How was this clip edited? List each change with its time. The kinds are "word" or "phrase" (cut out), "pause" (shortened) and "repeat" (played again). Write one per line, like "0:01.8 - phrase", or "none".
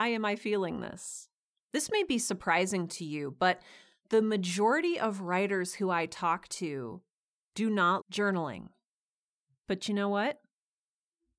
0:01.6 - pause
0:08.0 - word